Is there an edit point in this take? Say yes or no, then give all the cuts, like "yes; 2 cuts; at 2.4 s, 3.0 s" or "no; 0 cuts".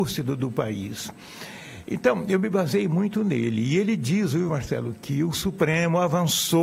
no; 0 cuts